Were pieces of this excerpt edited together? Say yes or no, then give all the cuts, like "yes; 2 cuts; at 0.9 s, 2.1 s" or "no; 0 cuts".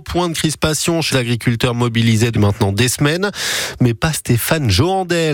yes; 3 cuts; at 1.1 s, 2.3 s, 4.1 s